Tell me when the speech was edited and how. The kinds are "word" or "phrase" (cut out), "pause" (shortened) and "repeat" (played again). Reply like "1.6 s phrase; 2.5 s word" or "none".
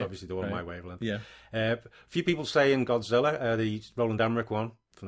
none